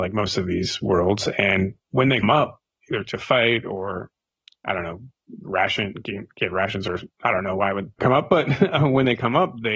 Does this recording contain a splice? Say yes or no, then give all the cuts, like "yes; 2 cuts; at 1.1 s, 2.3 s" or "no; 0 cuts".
yes; 3 cuts; at 1.8 s, 2.2 s, 8.0 s